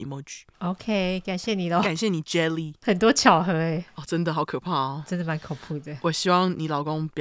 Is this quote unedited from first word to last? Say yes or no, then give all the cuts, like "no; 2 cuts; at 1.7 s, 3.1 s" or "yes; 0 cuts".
yes; 0 cuts